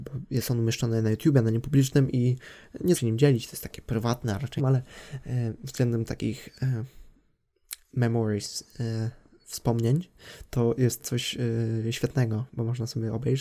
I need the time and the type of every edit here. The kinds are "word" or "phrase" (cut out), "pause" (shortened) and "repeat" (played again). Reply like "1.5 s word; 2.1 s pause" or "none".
2.9 s word; 4.6 s word; 11.0 s word